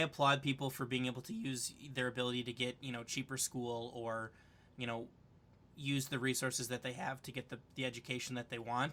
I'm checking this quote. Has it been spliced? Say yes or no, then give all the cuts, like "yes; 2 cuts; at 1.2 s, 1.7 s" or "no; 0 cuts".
no; 0 cuts